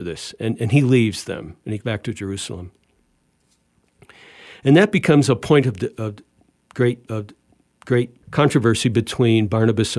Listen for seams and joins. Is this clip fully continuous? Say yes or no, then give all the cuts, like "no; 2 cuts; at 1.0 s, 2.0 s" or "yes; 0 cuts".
no; 2 cuts; at 1.8 s, 7.1 s